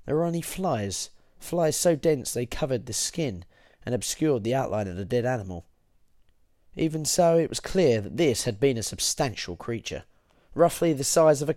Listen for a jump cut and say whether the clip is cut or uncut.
uncut